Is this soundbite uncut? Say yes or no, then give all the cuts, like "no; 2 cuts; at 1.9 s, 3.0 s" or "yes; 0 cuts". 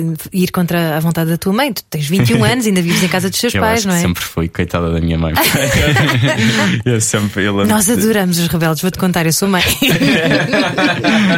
yes; 0 cuts